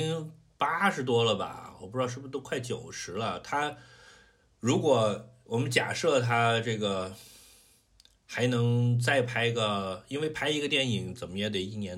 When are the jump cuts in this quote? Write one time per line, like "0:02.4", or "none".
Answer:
none